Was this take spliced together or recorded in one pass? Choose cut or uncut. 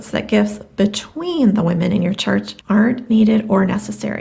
cut